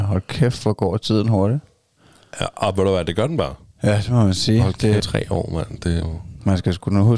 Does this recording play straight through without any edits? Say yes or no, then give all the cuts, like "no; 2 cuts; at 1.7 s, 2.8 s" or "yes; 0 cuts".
no; 2 cuts; at 5.0 s, 6.0 s